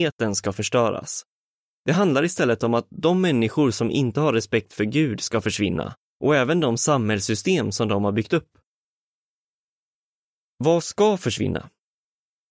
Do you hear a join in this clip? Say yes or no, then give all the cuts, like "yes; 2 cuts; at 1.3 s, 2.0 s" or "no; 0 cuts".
no; 0 cuts